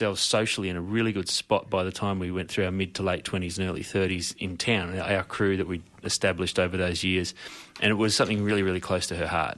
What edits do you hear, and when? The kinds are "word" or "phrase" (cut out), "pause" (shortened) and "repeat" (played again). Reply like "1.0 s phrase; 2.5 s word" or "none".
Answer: none